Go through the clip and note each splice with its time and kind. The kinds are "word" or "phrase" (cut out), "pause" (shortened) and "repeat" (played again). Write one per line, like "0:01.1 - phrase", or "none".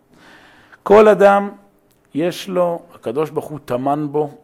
none